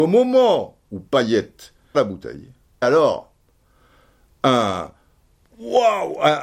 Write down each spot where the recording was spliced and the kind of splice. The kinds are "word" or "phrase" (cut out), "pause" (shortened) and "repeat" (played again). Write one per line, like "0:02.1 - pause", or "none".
0:01.9 - word
0:02.8 - word